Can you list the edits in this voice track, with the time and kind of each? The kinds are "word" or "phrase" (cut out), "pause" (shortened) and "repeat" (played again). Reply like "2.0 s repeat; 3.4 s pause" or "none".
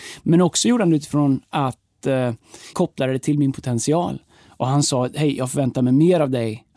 2.7 s phrase